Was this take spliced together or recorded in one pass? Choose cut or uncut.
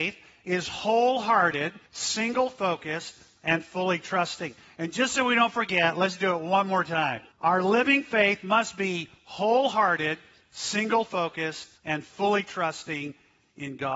cut